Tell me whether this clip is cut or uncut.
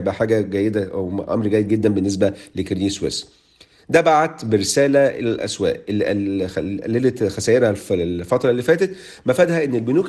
uncut